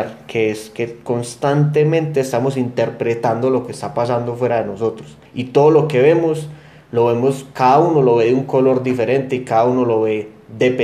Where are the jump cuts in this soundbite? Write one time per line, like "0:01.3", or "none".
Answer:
0:05.3